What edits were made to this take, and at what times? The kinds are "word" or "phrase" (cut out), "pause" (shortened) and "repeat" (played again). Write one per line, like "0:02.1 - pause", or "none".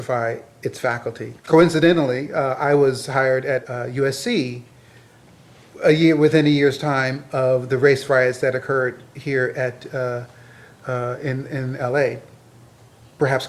0:01.4 - pause